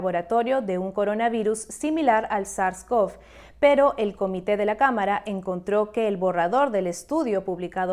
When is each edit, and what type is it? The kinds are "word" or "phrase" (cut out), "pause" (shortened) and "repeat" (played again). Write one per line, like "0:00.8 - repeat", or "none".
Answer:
none